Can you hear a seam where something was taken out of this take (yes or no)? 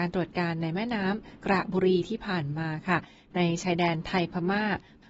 no